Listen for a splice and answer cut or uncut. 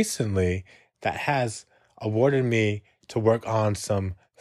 uncut